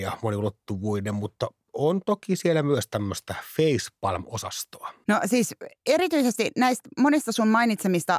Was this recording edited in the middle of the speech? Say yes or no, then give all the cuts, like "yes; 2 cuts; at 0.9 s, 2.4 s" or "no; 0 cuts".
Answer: no; 0 cuts